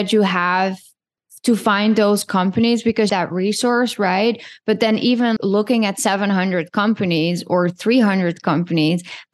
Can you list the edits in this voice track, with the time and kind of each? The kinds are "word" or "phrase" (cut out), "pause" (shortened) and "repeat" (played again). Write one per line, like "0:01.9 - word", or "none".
0:03.1 - phrase
0:05.4 - word